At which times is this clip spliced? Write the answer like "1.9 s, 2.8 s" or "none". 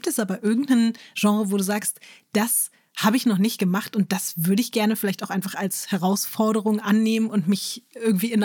none